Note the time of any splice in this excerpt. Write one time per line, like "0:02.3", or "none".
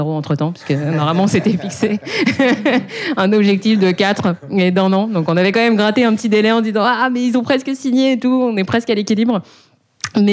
none